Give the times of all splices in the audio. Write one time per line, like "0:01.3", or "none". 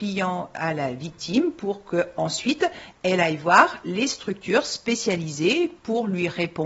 none